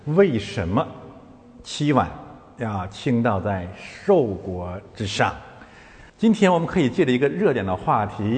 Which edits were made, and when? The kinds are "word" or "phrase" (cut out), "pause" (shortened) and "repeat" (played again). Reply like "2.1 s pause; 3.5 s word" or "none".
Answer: 6.1 s pause

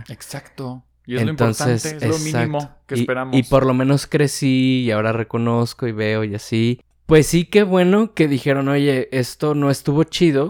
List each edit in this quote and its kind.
none

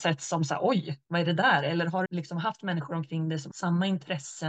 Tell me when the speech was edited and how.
2.1 s word; 3.5 s word

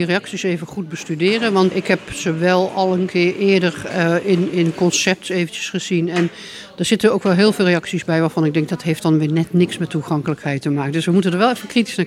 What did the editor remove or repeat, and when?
1.7 s word

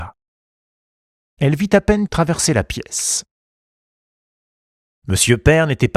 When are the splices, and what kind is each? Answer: 2.1 s word

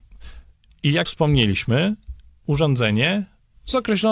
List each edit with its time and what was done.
1.1 s word

